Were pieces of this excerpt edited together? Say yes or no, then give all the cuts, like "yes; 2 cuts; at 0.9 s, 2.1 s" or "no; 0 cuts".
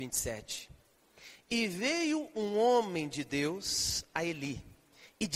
no; 0 cuts